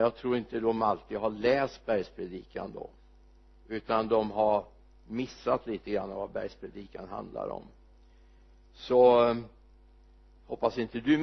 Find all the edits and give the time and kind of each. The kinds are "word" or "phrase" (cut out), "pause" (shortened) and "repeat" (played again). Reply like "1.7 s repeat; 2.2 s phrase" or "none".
none